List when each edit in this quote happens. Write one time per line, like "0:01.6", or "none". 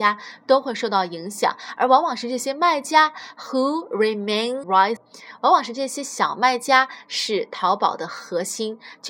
0:04.6
0:05.0